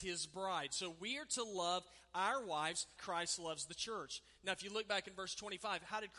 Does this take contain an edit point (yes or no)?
yes